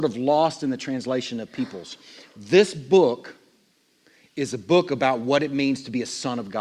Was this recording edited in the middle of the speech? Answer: no; 0 cuts

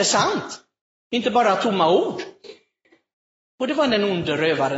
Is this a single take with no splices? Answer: yes; 0 cuts

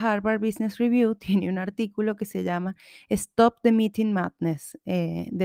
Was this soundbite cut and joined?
no; 0 cuts

